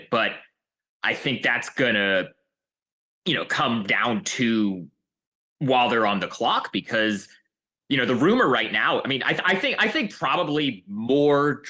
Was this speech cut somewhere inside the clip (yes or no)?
no